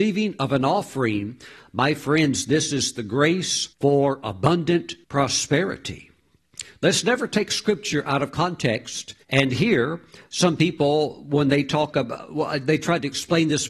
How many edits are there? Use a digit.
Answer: 3